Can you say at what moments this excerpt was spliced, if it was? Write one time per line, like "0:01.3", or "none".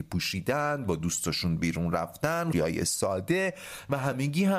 0:02.5